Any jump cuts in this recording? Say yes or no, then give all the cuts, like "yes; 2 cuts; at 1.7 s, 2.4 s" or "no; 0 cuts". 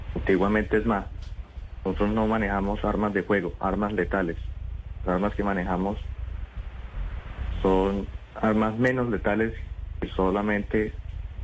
no; 0 cuts